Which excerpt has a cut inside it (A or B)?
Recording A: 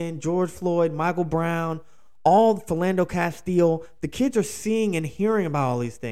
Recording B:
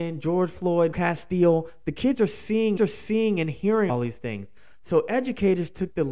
B